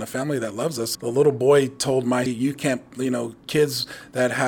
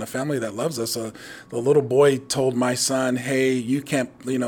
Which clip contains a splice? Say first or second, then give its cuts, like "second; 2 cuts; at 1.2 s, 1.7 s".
first; 2 cuts; at 0.9 s, 2.3 s